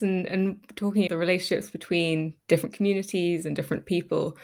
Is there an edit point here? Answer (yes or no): yes